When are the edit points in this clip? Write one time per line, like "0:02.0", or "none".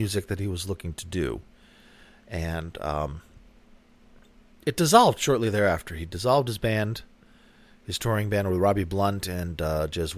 none